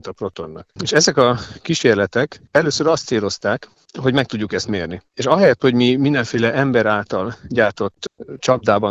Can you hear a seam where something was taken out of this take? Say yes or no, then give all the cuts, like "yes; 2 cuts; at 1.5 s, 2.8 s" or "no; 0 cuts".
no; 0 cuts